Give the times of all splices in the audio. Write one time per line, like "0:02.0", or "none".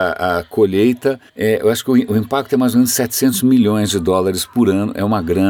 0:01.3